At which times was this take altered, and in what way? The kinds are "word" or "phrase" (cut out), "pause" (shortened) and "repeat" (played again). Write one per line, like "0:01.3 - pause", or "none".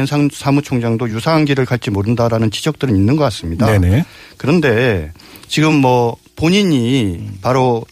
none